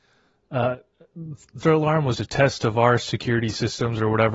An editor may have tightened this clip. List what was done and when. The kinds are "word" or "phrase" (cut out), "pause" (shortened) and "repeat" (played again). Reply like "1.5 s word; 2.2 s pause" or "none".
1.6 s word; 2.1 s word